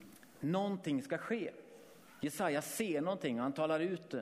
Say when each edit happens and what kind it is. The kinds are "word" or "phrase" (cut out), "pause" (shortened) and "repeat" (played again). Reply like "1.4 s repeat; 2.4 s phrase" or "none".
none